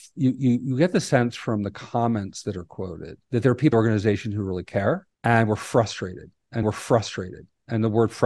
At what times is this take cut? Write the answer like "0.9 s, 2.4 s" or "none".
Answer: 3.2 s, 3.7 s, 5.1 s, 6.6 s